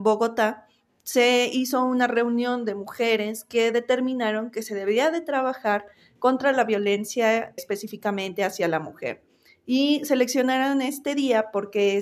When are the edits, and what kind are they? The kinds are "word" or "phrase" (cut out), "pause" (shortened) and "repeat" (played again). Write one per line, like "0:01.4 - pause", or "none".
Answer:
0:07.6 - word